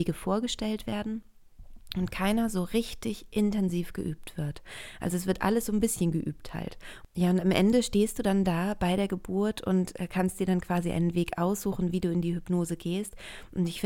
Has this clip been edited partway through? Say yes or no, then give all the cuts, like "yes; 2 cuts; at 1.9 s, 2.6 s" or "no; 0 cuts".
no; 0 cuts